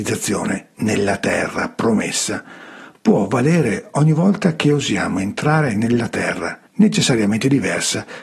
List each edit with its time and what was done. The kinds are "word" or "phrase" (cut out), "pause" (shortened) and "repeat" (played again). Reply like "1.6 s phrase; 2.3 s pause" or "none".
6.7 s pause